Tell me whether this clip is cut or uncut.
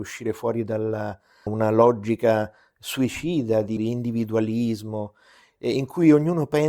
cut